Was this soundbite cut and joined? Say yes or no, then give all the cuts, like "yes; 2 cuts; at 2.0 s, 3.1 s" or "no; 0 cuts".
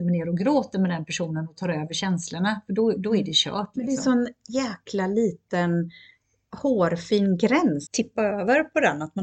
yes; 1 cut; at 7.9 s